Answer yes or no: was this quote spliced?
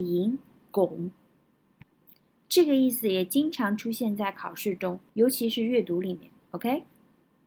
yes